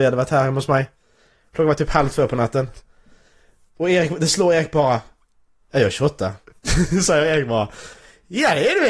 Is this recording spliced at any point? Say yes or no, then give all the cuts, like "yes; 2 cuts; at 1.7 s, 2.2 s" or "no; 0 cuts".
no; 0 cuts